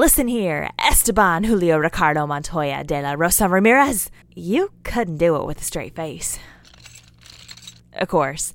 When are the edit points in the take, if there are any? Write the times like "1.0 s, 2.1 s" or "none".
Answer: 4.2 s